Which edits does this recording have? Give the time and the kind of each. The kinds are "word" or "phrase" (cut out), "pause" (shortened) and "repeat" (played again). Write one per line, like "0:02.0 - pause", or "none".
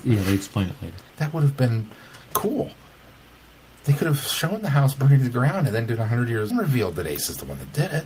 0:01.1 - pause
0:06.5 - phrase